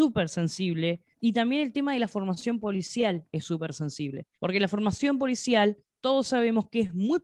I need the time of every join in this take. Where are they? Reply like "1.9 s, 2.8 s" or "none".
1.1 s, 4.3 s

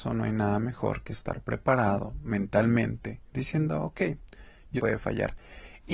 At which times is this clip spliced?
3.3 s, 4.8 s

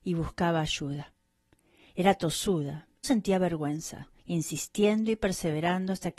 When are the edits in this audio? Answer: 3.0 s, 4.2 s

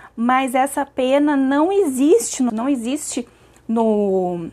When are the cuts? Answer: 2.5 s

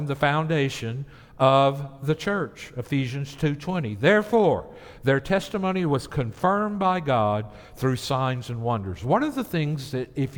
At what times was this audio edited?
none

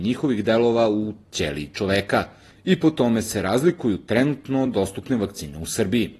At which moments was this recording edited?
none

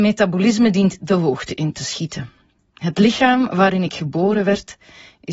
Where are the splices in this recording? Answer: 1.0 s

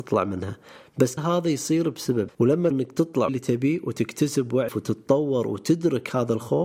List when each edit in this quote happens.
1.2 s, 2.3 s, 2.7 s, 3.3 s, 4.7 s

